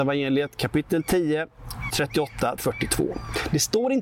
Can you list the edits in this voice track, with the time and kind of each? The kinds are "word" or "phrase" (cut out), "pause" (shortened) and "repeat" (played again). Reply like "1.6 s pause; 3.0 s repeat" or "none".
1.9 s word; 2.6 s word